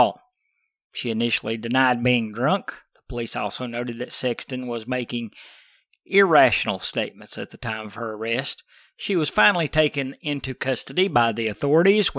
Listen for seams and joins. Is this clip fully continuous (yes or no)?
yes